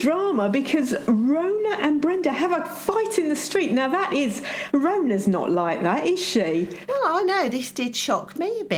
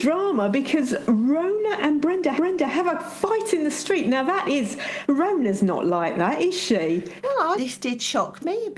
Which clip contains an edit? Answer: second; 2 cuts; at 2.4 s, 7.6 s

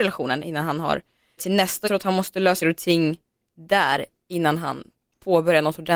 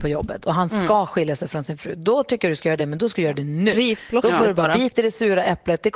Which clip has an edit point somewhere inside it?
first; 3 cuts; at 1.4 s, 1.8 s, 2.6 s

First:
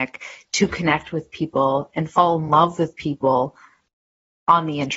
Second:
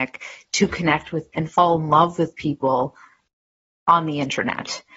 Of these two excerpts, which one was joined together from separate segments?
second; 1 cut; at 1.3 s

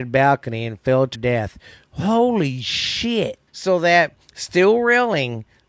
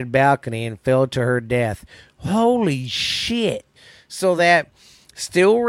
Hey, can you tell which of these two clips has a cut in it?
first; 3 cuts; at 1.1 s, 3.5 s, 4.2 s

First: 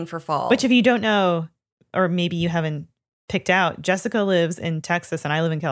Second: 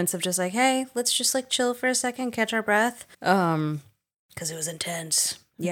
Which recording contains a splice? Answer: second; 1 cut; at 3.1 s

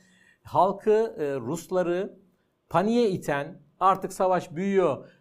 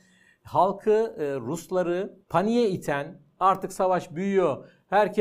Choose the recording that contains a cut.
second; 1 cut; at 2.2 s

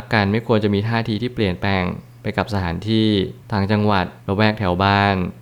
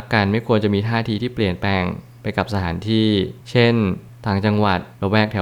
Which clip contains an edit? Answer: first; 1 cut; at 3.4 s

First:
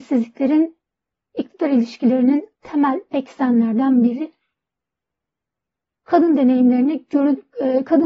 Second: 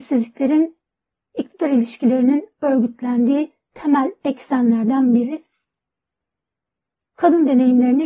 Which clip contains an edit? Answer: first; 1 cut; at 2.5 s

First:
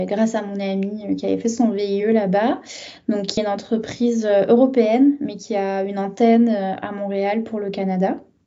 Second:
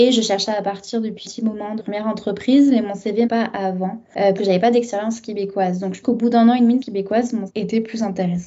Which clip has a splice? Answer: second; 7 cuts; at 1.2 s, 1.8 s, 3.2 s, 4.4 s, 6.0 s, 6.8 s, 7.5 s

